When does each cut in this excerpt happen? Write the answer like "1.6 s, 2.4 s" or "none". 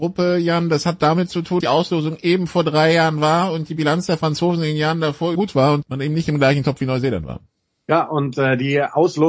1.6 s, 5.4 s, 5.8 s